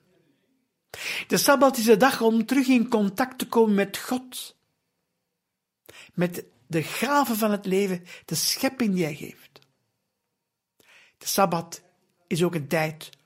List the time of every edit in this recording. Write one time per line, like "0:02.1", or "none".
none